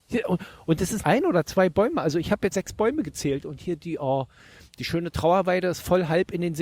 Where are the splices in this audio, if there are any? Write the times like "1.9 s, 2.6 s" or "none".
1.0 s, 2.5 s